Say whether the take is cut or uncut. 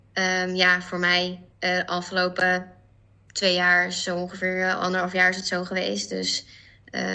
cut